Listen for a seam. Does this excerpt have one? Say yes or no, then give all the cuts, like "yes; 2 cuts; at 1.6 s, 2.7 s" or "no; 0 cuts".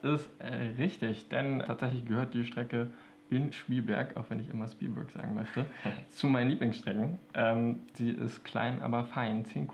yes; 3 cuts; at 1.6 s, 3.5 s, 7.9 s